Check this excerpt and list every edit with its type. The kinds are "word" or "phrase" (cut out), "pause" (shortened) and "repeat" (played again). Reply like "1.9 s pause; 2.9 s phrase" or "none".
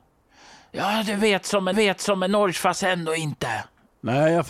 1.7 s repeat